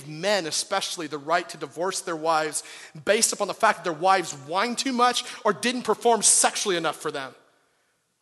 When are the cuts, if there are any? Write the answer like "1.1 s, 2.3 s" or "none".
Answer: none

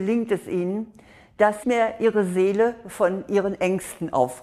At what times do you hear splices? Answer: 1.6 s

